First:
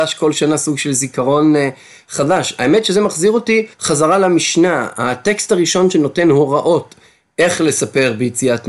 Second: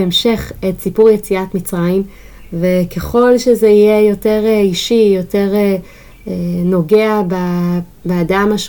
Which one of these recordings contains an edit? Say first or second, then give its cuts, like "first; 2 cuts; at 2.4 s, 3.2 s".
first; 1 cut; at 3.7 s